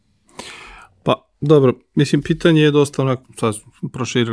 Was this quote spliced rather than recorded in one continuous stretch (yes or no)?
no